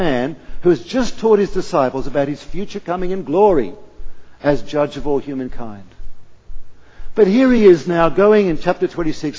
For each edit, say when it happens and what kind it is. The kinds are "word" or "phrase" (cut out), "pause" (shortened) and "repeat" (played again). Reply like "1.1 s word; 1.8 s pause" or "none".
none